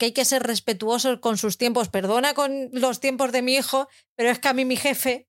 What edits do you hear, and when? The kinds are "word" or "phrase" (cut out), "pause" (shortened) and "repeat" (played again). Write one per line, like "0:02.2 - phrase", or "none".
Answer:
none